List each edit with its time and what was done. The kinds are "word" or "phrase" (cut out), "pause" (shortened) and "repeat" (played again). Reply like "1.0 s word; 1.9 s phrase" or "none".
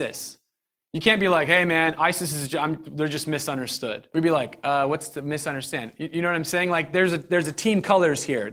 4.1 s pause